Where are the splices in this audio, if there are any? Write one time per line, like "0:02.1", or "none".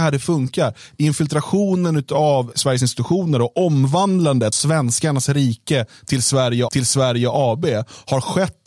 0:02.5
0:04.5
0:06.7